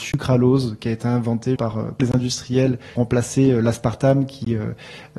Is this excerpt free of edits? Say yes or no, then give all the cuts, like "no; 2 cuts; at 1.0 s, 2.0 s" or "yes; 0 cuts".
no; 3 cuts; at 1.6 s, 2.0 s, 3.0 s